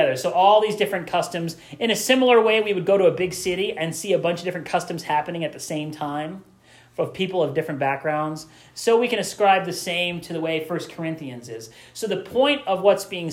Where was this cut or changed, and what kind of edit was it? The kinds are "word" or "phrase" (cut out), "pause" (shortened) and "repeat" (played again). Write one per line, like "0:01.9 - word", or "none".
none